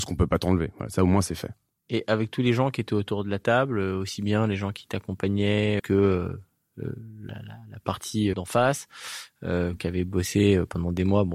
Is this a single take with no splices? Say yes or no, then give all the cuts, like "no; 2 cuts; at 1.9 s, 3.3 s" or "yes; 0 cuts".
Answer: no; 3 cuts; at 5.8 s, 7.3 s, 8.3 s